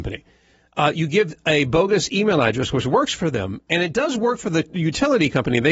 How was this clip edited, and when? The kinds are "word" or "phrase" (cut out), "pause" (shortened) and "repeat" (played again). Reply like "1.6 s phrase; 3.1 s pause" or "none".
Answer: none